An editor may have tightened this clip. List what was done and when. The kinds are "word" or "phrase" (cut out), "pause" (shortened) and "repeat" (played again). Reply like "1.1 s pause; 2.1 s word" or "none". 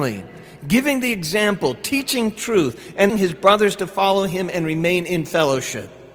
3.1 s word